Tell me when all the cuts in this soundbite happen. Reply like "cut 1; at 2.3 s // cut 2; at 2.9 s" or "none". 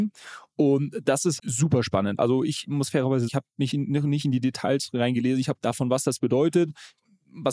cut 1; at 1.4 s // cut 2; at 2.7 s // cut 3; at 3.3 s // cut 4; at 3.7 s // cut 5; at 5.5 s